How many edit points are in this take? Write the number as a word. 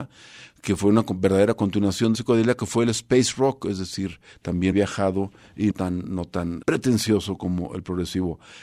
four